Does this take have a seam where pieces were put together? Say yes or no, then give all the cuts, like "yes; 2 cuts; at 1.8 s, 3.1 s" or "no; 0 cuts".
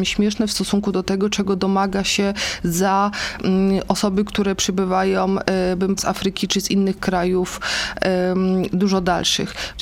yes; 1 cut; at 6.0 s